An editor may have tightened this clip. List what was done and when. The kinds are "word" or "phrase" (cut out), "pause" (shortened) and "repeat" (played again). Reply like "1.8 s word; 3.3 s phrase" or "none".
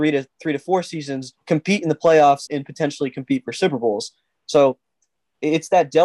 1.4 s pause; 2.5 s word